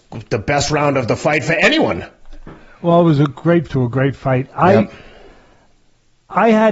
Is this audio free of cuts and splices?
no; 1 cut; at 3.7 s

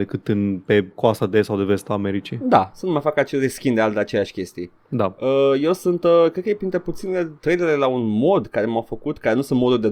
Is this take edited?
yes; 1 cut; at 7.4 s

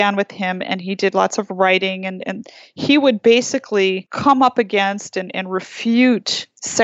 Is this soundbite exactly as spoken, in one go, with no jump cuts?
yes; 0 cuts

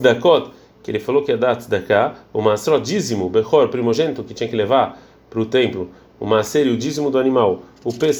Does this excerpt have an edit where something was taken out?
no; 0 cuts

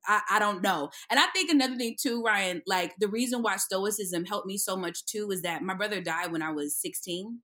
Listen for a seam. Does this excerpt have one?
no; 0 cuts

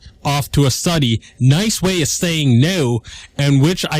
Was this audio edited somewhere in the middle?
no; 0 cuts

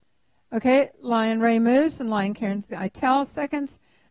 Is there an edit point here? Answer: yes; 1 cut; at 2.7 s

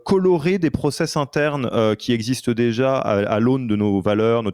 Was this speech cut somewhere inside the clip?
no; 0 cuts

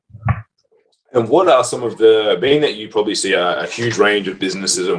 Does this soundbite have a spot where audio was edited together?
no; 0 cuts

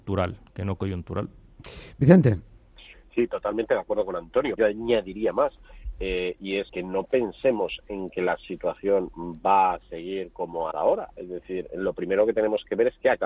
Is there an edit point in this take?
yes; 3 cuts; at 4.6 s, 6.7 s, 10.7 s

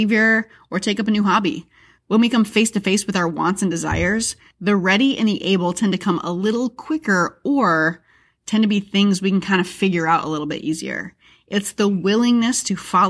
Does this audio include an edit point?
no; 0 cuts

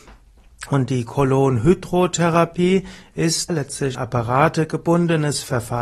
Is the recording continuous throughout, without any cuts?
no; 2 cuts; at 3.5 s, 3.9 s

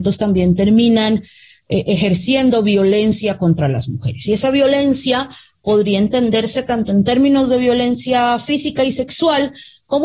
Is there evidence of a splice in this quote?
no; 0 cuts

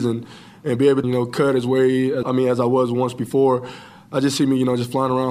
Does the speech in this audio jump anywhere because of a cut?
yes; 2 cuts; at 1.0 s, 2.2 s

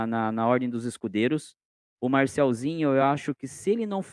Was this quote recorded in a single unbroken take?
yes; 0 cuts

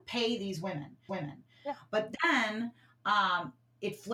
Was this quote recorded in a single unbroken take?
no; 1 cut; at 1.1 s

